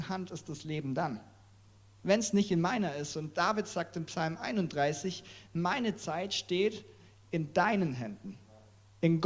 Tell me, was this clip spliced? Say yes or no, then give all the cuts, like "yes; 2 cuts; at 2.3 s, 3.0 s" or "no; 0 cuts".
no; 0 cuts